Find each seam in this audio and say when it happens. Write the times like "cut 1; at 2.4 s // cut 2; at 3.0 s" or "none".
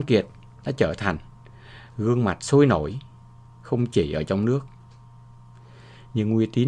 none